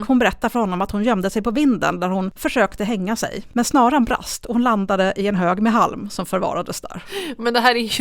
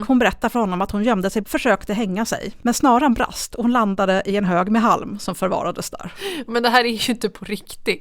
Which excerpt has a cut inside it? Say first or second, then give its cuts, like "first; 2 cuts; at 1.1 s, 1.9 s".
second; 1 cut; at 1.4 s